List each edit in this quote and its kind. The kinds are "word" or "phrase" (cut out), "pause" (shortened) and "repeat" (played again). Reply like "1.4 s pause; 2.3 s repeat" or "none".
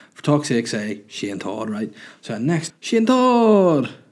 2.7 s word